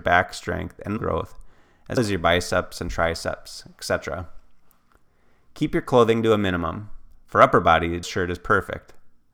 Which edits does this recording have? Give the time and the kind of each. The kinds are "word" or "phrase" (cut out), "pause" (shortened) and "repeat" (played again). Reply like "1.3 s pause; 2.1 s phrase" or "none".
1.0 s word; 2.0 s word; 8.0 s phrase